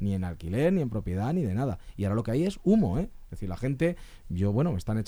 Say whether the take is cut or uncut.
uncut